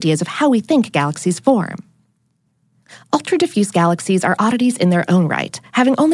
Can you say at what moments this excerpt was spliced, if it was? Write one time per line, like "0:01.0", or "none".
none